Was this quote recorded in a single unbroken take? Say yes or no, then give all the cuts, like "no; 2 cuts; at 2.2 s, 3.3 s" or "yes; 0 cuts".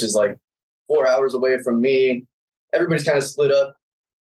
yes; 0 cuts